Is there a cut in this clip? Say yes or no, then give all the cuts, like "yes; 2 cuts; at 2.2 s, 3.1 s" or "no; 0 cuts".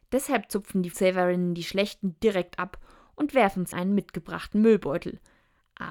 yes; 2 cuts; at 0.9 s, 3.7 s